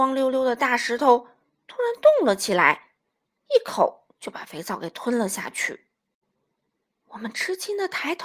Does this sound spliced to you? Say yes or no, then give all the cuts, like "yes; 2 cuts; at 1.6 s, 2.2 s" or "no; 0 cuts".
no; 0 cuts